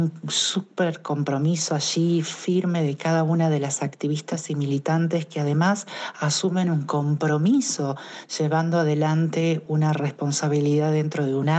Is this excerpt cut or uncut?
uncut